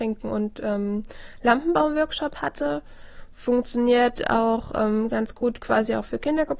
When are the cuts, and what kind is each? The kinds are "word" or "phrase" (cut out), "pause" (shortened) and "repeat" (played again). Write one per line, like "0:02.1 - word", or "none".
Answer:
none